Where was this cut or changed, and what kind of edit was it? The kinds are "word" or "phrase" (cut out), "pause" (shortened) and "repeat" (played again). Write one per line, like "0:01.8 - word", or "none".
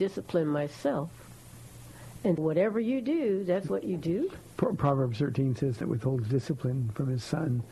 0:02.4 - word
0:03.7 - word
0:05.8 - word